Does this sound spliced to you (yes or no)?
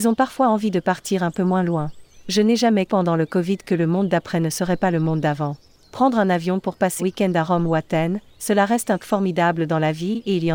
yes